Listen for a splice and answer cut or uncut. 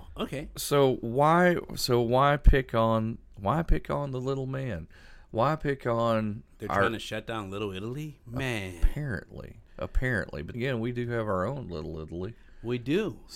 cut